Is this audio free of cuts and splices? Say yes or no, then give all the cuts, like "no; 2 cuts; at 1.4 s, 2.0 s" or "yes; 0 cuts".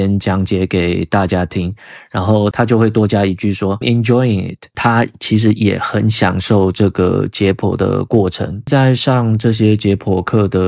no; 1 cut; at 3.8 s